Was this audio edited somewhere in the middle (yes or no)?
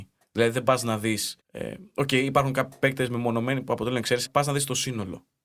yes